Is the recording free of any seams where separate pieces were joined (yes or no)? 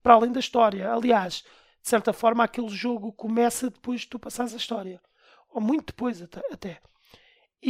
yes